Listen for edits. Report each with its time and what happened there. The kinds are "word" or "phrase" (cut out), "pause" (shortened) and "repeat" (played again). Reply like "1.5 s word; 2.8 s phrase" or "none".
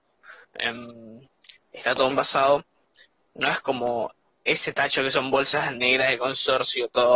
2.1 s word